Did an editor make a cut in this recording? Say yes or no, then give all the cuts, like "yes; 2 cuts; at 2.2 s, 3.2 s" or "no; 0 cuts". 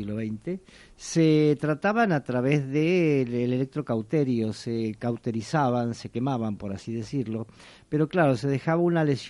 no; 0 cuts